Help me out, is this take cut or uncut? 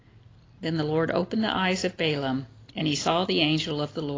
uncut